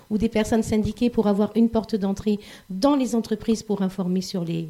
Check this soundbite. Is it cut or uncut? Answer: uncut